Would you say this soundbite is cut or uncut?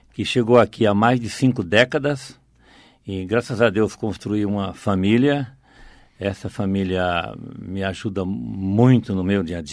uncut